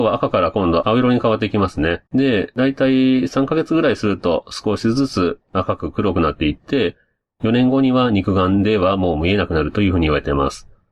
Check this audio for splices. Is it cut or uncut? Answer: cut